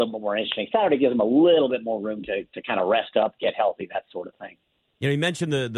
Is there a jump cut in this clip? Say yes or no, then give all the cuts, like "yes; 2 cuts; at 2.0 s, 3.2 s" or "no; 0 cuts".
no; 0 cuts